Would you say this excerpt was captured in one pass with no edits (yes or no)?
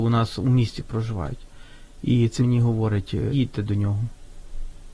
no